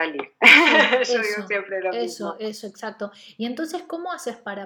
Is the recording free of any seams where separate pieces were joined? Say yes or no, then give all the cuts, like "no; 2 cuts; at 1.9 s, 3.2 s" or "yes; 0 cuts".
yes; 0 cuts